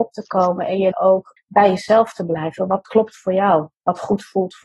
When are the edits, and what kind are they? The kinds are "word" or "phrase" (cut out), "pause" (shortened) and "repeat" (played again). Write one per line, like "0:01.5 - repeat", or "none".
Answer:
0:00.9 - word
0:01.4 - phrase
0:02.8 - word
0:03.7 - pause